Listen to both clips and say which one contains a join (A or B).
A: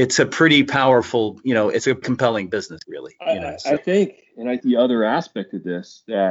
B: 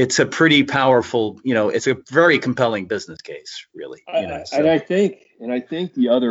A